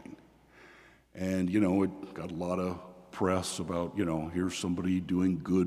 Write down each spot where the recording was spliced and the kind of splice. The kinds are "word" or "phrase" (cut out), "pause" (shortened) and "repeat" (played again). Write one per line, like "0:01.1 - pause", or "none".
none